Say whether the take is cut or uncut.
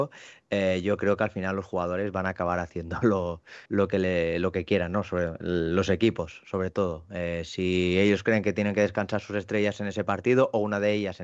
cut